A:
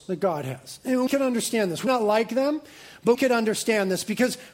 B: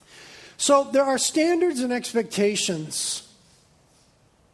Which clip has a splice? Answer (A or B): A